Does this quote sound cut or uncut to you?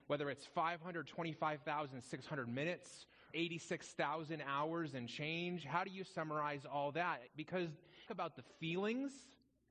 cut